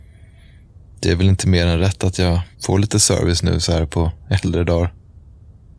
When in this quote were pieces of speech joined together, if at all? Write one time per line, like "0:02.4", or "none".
0:02.5

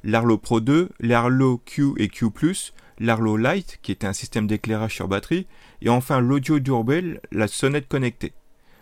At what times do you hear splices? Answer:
none

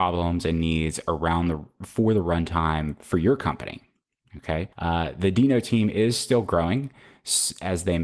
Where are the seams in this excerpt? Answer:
0:04.7

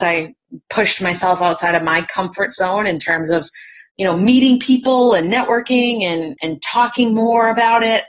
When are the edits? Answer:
0:03.9

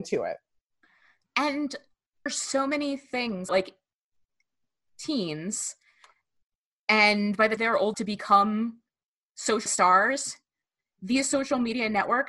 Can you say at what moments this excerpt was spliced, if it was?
0:02.3
0:03.5
0:07.6
0:07.9
0:09.7

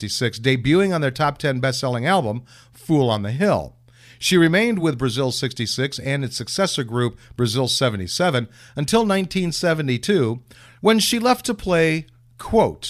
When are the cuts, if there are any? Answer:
none

